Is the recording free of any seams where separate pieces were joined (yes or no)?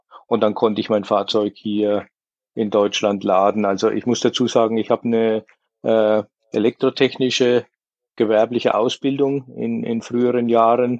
yes